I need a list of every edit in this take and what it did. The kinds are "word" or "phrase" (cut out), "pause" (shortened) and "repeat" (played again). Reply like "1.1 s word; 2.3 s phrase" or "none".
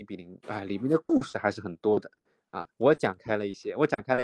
2.7 s pause